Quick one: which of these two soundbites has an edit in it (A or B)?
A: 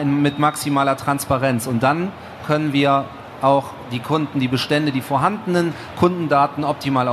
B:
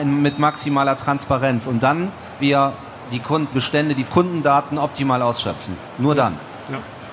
B